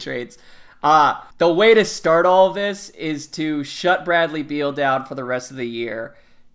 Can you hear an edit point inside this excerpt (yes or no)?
yes